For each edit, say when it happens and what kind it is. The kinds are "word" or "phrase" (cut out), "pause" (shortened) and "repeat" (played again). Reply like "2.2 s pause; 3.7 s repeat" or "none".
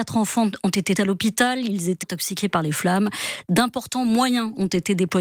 1.0 s word; 2.0 s word